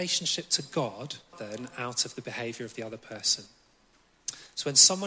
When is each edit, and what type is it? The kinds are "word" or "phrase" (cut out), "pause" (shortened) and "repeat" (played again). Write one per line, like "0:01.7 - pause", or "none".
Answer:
0:01.3 - word